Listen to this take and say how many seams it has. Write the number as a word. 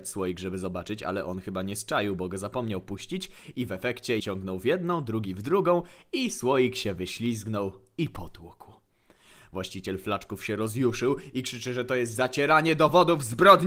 one